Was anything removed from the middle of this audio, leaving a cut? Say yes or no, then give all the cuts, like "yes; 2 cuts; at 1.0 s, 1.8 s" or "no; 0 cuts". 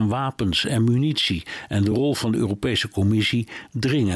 no; 0 cuts